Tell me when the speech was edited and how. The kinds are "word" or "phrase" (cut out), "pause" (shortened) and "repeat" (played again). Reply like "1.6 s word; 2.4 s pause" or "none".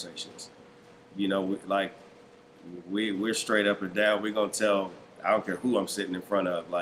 none